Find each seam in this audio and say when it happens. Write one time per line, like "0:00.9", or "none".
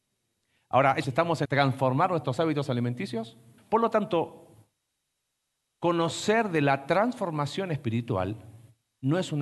0:01.0
0:01.5
0:03.6